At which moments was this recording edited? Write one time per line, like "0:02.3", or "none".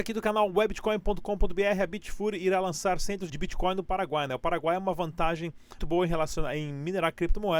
0:03.3
0:05.8

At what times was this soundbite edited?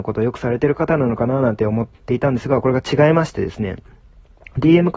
0:01.9

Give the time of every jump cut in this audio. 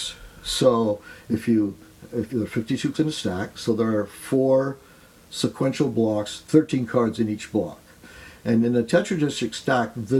0:02.3
0:02.9

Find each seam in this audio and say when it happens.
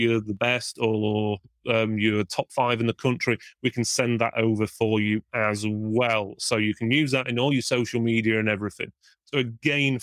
none

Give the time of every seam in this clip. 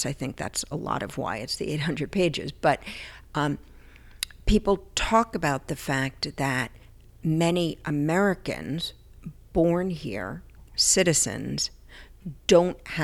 none

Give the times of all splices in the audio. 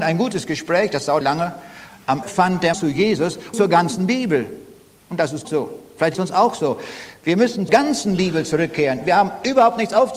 0:01.2
0:02.2
0:02.7
0:03.5
0:05.4
0:06.1
0:07.7

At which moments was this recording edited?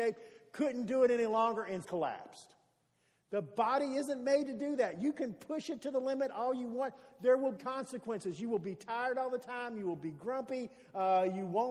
0:01.8
0:07.6

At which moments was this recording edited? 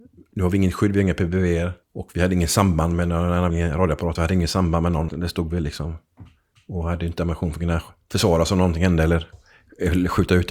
0:01.8
0:03.5
0:04.1
0:05.1

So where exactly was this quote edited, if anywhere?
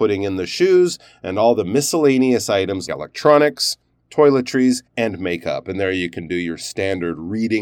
0:02.9
0:04.9

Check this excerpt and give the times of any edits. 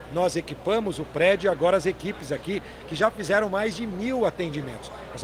none

